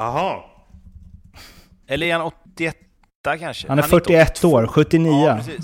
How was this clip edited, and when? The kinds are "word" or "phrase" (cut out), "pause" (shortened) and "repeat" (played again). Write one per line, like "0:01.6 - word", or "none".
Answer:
none